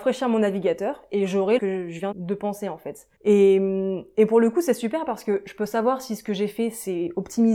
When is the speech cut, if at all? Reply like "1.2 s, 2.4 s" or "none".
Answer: 1.6 s, 2.1 s, 3.1 s